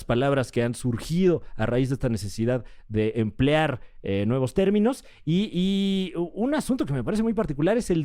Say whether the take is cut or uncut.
uncut